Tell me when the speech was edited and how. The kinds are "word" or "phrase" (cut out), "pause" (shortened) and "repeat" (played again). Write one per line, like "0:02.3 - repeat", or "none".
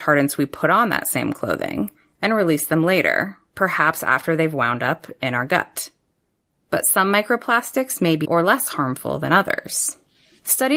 0:08.2 - word

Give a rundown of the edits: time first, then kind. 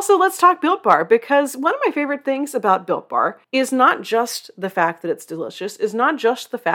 0:03.4 - pause

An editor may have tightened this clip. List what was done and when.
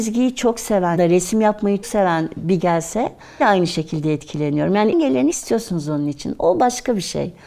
0:01.0 - word
0:01.8 - word
0:02.6 - word
0:03.4 - word
0:04.9 - word
0:05.3 - word

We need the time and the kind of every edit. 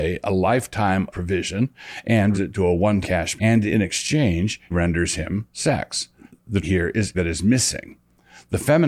0:01.1 - word
0:02.3 - word
0:03.0 - word
0:03.4 - word
0:04.7 - word
0:06.6 - word
0:07.1 - word

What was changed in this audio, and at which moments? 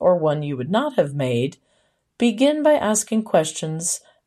none

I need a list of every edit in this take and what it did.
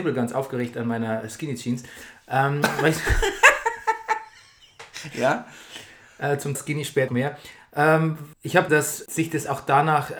0:06.5 - word
0:07.1 - word
0:08.3 - pause
0:08.7 - word
0:09.1 - word

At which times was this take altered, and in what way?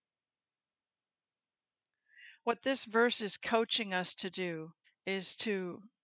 0:04.8 - pause

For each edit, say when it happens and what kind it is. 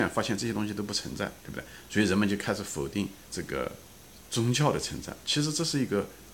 0:03.2 - pause

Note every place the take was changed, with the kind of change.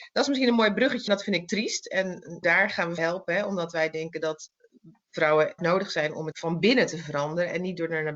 0:01.1 - word
0:02.4 - word
0:03.0 - word
0:05.6 - phrase
0:06.3 - word

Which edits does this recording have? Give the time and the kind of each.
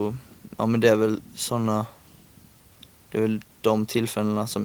none

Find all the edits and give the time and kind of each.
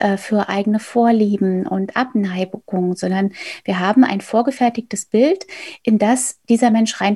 none

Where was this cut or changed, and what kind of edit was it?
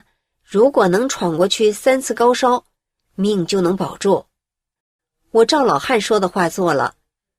none

